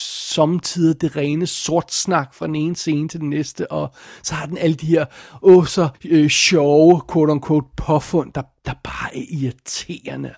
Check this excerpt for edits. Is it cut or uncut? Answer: cut